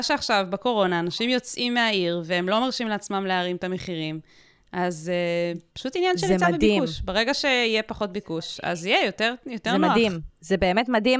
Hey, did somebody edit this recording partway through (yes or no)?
yes